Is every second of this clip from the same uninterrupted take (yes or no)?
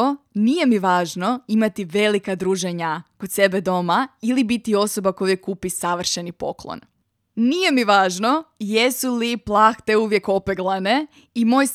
yes